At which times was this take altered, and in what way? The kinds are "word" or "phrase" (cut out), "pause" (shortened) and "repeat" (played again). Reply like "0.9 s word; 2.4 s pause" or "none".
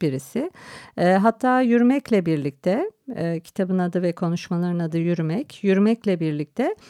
none